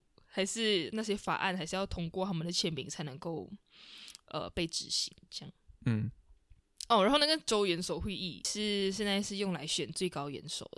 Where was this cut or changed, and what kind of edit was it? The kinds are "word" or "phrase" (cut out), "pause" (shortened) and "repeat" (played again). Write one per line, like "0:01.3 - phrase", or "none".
0:05.8 - pause